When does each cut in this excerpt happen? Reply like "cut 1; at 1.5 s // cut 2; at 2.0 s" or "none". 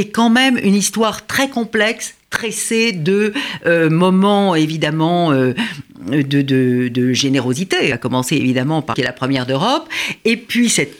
cut 1; at 7.9 s // cut 2; at 8.9 s